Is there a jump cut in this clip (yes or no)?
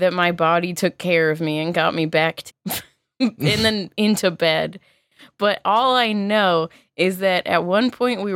yes